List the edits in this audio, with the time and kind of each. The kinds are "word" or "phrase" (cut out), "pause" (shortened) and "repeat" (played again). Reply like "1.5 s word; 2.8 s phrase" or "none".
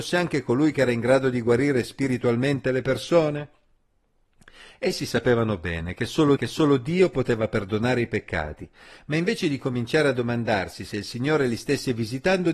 6.4 s repeat